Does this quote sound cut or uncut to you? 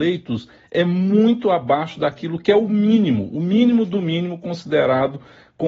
uncut